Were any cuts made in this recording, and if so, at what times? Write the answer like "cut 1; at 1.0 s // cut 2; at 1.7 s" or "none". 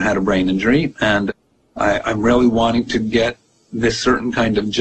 none